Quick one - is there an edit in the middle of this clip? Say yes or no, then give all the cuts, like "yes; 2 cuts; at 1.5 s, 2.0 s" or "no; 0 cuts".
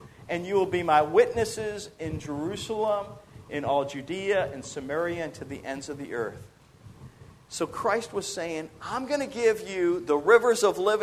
no; 0 cuts